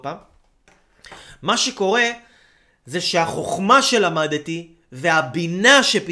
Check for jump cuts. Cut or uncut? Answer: uncut